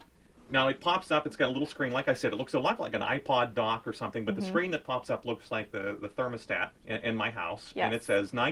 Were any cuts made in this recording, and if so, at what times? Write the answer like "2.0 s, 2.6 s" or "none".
6.8 s